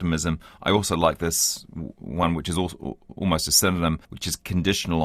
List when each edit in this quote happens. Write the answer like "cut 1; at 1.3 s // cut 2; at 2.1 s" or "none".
cut 1; at 4.0 s